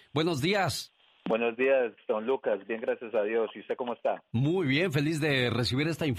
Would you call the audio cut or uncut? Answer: uncut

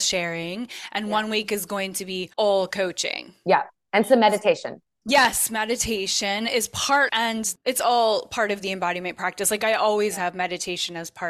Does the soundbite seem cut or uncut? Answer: cut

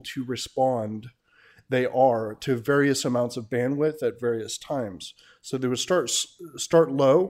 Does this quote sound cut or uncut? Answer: uncut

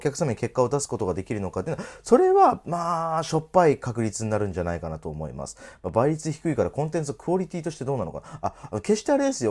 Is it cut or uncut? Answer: uncut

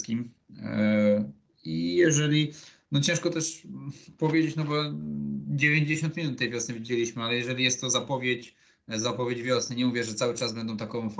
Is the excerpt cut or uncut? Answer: uncut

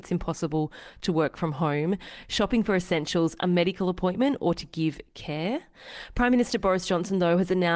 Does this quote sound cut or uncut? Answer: uncut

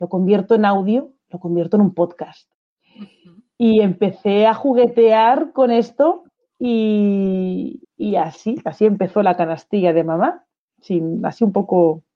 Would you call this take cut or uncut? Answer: cut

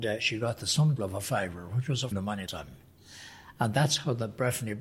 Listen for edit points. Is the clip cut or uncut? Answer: cut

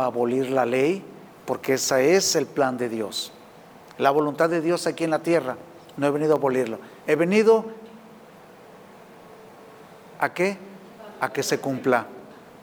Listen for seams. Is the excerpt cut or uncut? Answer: cut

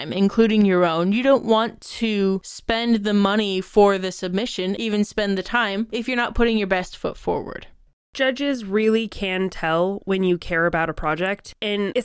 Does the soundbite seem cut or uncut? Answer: uncut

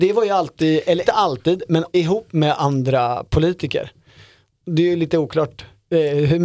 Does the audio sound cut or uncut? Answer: cut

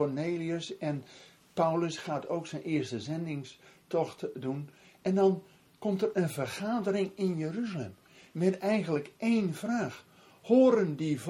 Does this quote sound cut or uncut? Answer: uncut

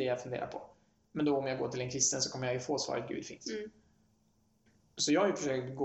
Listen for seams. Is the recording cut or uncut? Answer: uncut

